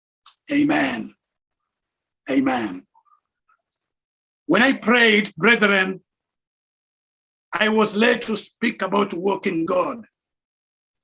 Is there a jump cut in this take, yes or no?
yes